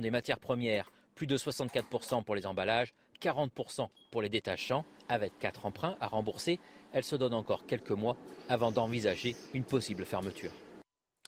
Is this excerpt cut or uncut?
uncut